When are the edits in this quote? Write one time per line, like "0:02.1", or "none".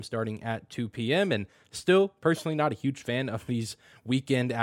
none